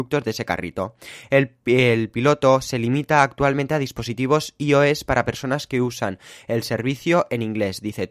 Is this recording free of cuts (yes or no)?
yes